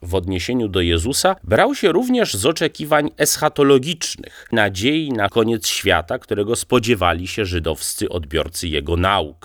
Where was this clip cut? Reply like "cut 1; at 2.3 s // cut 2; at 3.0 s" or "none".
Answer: cut 1; at 4.5 s // cut 2; at 5.3 s